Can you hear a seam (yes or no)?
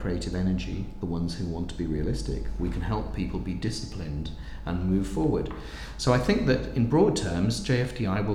no